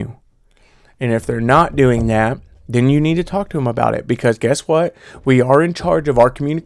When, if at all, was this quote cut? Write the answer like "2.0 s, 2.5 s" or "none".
none